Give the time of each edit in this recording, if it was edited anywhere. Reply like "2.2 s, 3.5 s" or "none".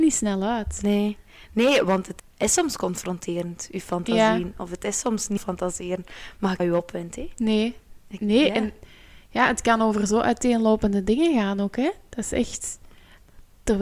5.4 s, 6.6 s, 8.0 s